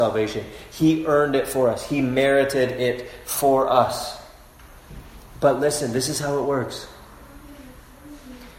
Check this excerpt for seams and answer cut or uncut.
uncut